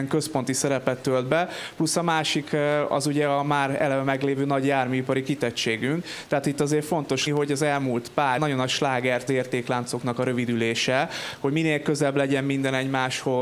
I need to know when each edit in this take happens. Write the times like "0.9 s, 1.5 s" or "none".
7.3 s, 8.4 s, 9.3 s